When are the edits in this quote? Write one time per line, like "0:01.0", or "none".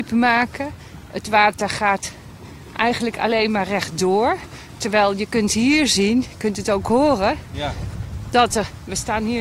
none